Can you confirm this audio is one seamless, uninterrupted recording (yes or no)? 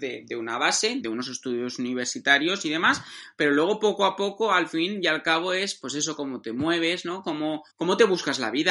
no